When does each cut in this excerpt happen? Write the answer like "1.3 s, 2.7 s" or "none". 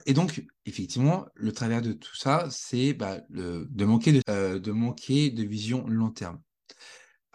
4.2 s